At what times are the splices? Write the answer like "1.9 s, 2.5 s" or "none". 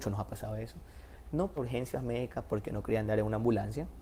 1.6 s